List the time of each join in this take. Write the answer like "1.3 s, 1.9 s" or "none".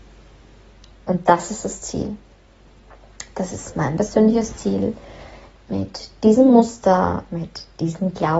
none